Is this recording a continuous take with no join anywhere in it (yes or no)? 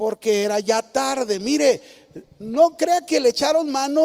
yes